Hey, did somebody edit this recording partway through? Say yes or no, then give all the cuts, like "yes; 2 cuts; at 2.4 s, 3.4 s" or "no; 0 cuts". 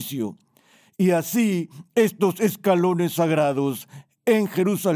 no; 0 cuts